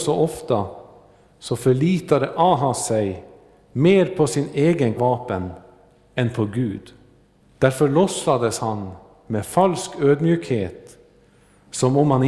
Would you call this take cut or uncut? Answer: cut